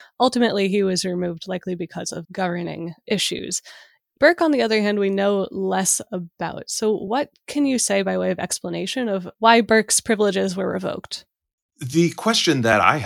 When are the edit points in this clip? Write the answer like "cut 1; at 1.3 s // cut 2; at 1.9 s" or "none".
cut 1; at 2.2 s